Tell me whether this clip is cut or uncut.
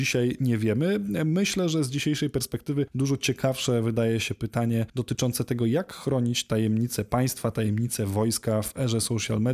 uncut